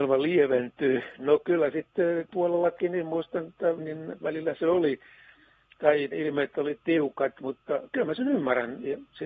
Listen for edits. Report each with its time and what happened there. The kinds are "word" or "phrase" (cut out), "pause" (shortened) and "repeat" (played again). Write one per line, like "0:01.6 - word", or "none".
0:02.3 - word
0:03.8 - phrase
0:05.8 - word
0:06.1 - word